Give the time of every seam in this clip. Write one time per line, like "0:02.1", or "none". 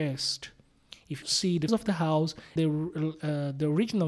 0:01.2
0:01.7
0:02.6